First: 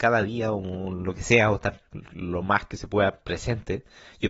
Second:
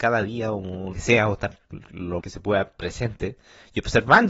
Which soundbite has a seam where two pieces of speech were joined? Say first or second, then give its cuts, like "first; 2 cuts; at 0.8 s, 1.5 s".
second; 2 cuts; at 0.9 s, 2.2 s